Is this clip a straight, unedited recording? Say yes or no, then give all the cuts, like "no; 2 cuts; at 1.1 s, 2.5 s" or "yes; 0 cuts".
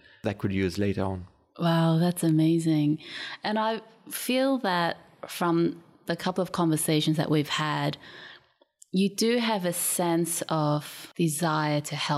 yes; 0 cuts